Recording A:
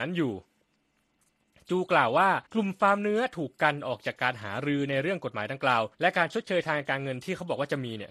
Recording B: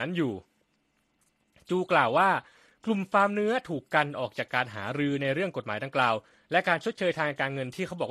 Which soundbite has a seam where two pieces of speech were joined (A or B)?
A